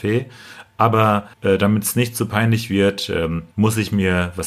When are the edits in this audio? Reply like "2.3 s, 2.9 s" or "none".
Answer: 1.3 s, 3.5 s